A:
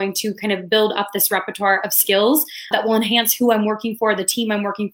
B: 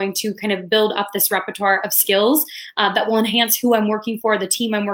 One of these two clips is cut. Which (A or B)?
A